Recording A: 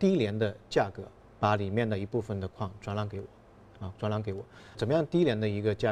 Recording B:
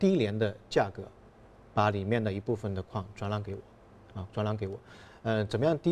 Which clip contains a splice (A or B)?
A